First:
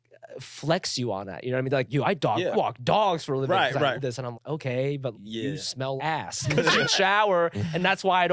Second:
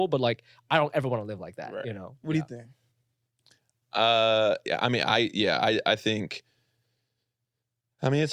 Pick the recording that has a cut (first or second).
first